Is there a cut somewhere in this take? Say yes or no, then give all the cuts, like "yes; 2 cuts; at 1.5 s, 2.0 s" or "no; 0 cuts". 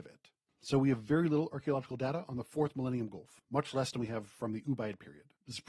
no; 0 cuts